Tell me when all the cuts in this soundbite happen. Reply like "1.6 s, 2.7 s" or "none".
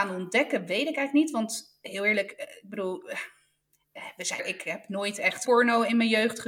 4.4 s, 5.4 s